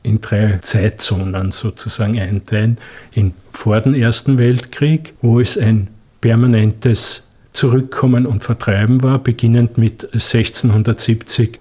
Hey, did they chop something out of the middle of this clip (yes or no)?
no